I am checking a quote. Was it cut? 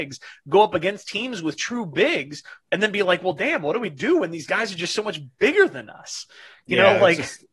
no; 0 cuts

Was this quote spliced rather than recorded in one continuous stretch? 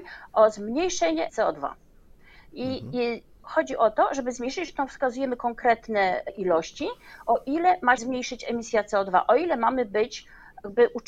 yes; 3 cuts; at 1.3 s, 6.3 s, 8.0 s

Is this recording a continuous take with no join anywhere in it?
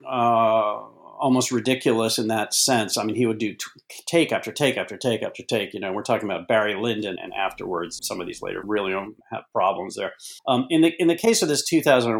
no; 5 cuts; at 7.2 s, 8.0 s, 8.6 s, 9.2 s, 10.4 s

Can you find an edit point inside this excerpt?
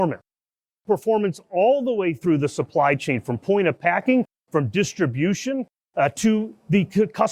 no; 0 cuts

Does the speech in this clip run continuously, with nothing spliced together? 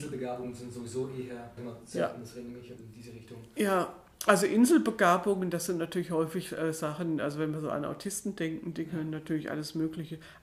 no; 2 cuts; at 1.6 s, 2.8 s

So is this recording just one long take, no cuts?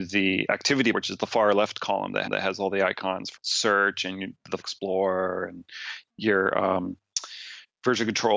no; 4 cuts; at 0.9 s, 2.2 s, 3.3 s, 4.6 s

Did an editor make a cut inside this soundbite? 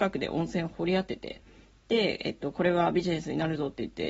no; 0 cuts

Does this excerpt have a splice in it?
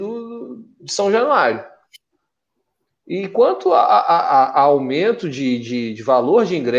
no; 0 cuts

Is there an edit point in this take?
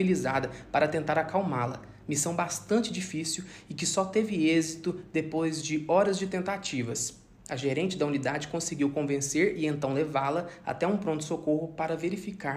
no; 0 cuts

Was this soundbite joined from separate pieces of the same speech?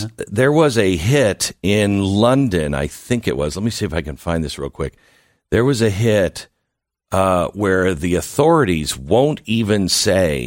no; 0 cuts

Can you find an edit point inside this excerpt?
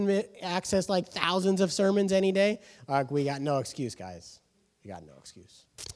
no; 0 cuts

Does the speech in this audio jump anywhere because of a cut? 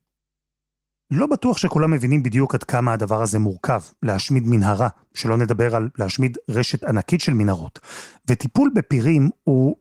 no; 0 cuts

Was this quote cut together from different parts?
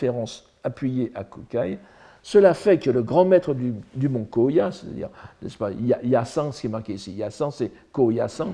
no; 0 cuts

